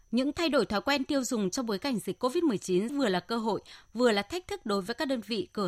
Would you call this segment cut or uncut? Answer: cut